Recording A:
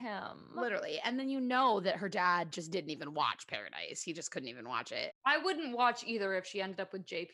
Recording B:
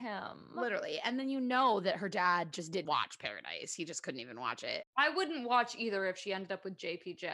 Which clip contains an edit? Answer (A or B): B